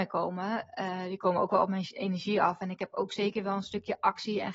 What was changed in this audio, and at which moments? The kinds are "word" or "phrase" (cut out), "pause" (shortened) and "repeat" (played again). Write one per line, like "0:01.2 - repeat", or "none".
none